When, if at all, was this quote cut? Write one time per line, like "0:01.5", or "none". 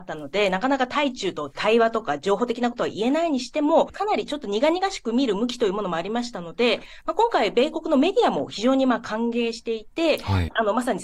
none